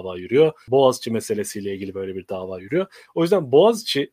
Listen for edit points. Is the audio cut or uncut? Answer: uncut